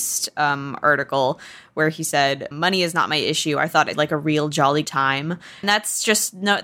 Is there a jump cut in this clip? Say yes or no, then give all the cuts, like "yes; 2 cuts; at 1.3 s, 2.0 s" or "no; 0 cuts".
yes; 4 cuts; at 2.5 s, 3.9 s, 4.8 s, 5.6 s